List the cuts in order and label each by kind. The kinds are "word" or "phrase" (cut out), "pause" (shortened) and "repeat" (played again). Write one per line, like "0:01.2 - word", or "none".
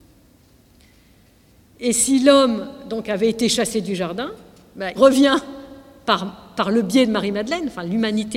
0:05.0 - word